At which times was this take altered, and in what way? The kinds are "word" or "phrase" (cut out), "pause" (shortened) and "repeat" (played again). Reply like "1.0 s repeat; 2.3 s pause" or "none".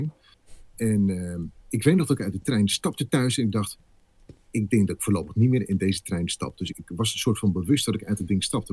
6.7 s word